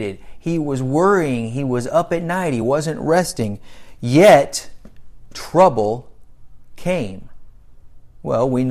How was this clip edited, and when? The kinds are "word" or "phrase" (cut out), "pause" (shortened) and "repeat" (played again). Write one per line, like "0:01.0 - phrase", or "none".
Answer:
none